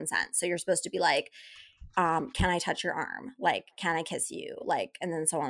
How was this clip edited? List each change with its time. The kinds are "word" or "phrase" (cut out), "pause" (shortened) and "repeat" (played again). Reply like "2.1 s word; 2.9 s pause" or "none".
none